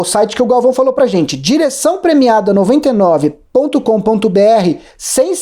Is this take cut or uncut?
uncut